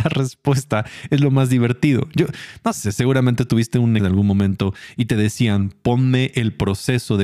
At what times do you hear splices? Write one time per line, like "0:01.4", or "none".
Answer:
0:04.0